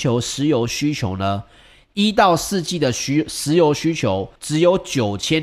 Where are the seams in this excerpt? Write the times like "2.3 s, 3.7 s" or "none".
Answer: 4.4 s